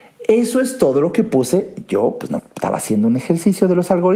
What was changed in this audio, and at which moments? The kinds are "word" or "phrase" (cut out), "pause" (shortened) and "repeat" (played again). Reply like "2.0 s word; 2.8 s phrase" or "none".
2.4 s word